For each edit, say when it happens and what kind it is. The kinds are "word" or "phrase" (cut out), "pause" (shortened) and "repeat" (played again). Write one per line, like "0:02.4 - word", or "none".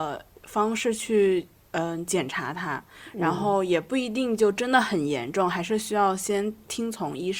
none